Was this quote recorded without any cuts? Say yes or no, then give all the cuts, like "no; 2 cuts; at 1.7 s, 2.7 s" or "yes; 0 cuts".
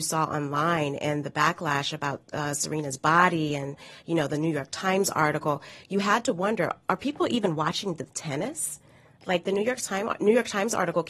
yes; 0 cuts